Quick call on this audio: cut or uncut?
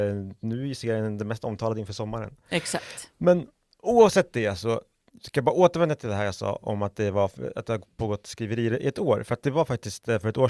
uncut